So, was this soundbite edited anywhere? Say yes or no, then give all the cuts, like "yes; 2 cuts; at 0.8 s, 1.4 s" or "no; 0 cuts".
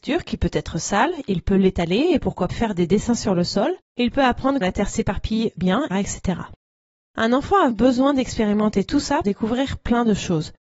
yes; 7 cuts; at 2.5 s, 3.8 s, 4.6 s, 5.6 s, 5.9 s, 7.7 s, 9.2 s